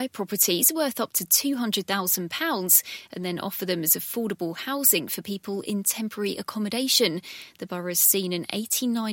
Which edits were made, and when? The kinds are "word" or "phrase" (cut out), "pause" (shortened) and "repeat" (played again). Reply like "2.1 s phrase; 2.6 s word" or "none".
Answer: none